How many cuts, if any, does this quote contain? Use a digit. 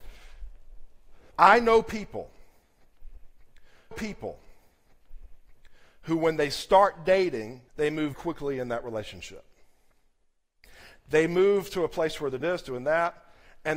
5